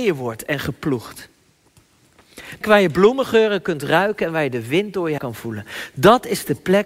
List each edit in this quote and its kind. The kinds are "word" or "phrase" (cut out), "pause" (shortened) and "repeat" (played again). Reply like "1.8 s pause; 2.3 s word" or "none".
2.6 s word; 5.2 s word